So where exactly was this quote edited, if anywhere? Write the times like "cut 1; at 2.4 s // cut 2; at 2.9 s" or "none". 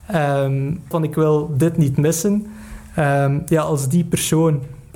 cut 1; at 0.9 s